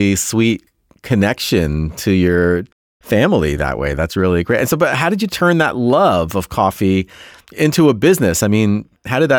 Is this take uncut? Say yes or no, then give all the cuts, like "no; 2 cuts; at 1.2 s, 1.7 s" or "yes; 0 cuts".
yes; 0 cuts